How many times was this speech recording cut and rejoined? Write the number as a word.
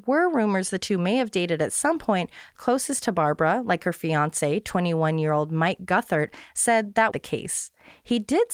two